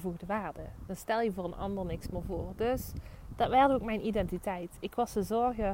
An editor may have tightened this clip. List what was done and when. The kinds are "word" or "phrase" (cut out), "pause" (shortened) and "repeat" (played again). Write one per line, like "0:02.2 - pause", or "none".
none